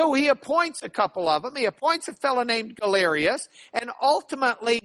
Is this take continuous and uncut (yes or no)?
yes